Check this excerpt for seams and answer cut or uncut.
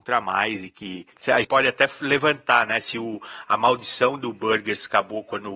cut